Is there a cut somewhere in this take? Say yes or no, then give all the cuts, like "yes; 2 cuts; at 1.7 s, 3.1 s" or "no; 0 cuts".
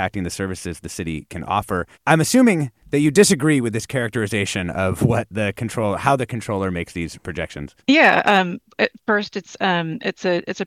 yes; 3 cuts; at 1.9 s, 7.8 s, 9.0 s